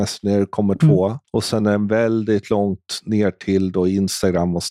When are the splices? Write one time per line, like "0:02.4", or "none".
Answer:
none